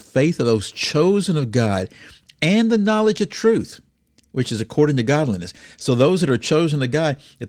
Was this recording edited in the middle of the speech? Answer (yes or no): no